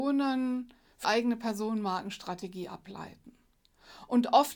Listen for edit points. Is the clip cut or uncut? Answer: cut